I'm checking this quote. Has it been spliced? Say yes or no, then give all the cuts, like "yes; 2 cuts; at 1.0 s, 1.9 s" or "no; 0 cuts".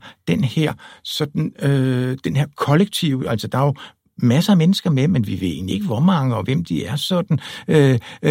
no; 0 cuts